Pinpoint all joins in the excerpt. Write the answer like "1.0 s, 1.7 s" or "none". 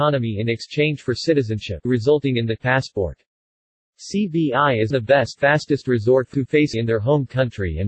1.8 s, 2.6 s, 4.9 s, 5.4 s, 6.3 s, 6.7 s